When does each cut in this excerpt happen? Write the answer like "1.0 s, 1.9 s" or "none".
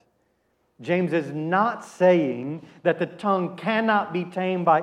none